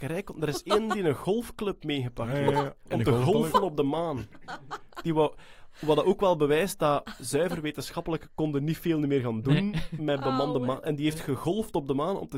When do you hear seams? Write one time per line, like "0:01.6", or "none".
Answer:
none